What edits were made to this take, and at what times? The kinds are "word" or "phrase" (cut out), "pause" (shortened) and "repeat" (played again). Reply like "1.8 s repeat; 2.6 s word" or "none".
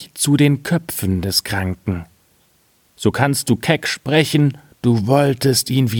4.7 s pause